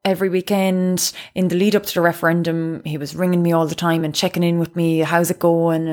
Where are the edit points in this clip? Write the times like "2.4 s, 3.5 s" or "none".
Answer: none